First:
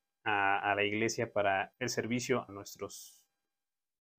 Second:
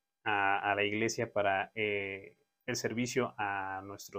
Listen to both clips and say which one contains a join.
first; 2 cuts; at 1.7 s, 2.5 s

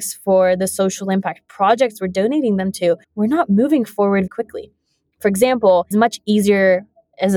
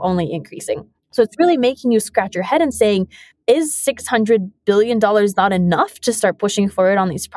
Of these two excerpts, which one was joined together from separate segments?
first; 3 cuts; at 3.0 s, 4.3 s, 5.9 s

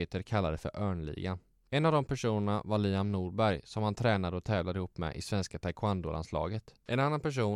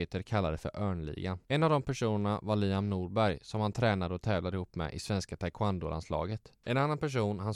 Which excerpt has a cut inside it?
second; 1 cut; at 1.4 s

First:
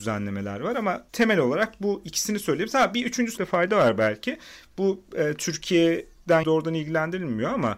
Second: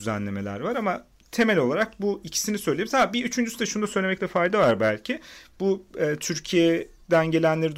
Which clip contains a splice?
first; 3 cuts; at 1.1 s, 3.4 s, 6.4 s

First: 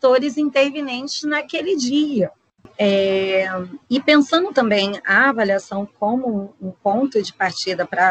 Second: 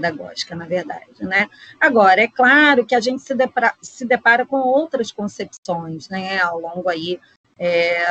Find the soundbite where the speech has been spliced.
first; 1 cut; at 3.8 s

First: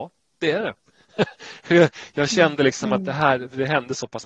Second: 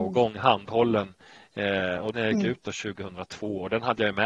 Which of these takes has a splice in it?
second; 1 cut; at 2.1 s

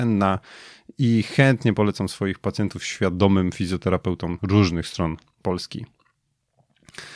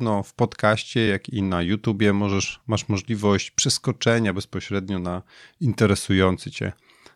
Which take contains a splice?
first; 1 cut; at 4.4 s

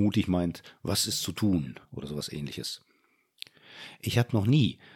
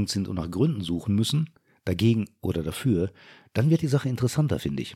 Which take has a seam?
first; 1 cut; at 1.8 s

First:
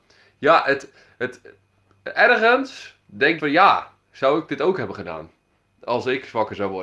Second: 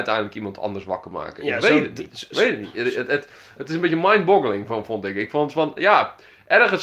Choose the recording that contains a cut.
first; 1 cut; at 3.4 s

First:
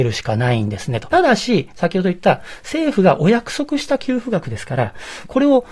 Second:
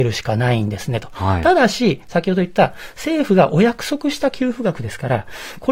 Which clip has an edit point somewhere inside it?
first; 1 cut; at 1.1 s

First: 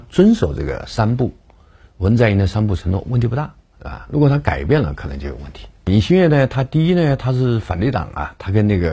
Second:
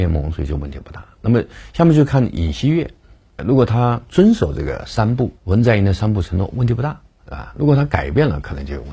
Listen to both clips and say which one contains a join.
second; 2 cuts; at 3.4 s, 5.4 s

